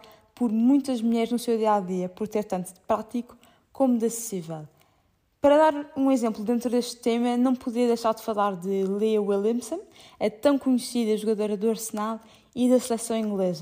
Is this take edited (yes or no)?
no